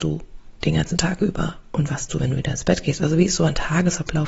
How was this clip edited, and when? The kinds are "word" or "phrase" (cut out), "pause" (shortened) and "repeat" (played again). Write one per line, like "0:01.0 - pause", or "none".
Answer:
0:02.1 - word